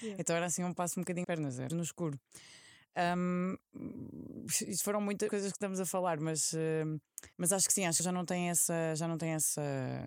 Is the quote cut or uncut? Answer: cut